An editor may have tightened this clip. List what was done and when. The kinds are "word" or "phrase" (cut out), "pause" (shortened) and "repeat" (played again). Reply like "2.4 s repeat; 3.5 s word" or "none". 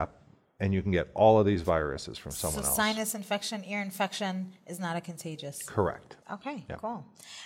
6.2 s pause